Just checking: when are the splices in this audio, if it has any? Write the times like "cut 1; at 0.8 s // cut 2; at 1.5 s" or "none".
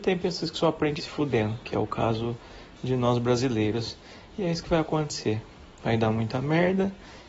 cut 1; at 1.0 s